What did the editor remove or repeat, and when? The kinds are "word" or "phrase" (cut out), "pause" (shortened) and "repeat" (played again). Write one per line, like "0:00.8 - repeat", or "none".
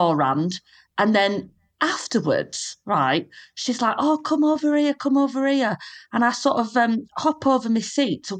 none